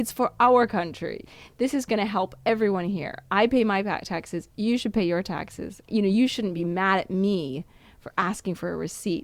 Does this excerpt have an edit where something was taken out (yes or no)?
no